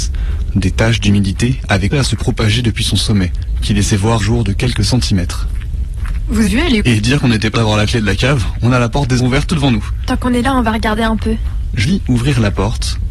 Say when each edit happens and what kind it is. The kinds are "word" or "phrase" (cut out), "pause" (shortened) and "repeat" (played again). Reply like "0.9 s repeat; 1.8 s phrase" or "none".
1.9 s word; 4.2 s word; 6.5 s word; 6.8 s word; 7.5 s word; 9.2 s word; 9.5 s word; 11.8 s word